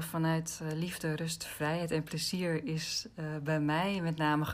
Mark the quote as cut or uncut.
uncut